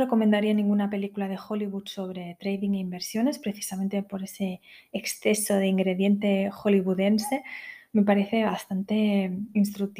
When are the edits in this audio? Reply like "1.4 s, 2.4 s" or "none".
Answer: none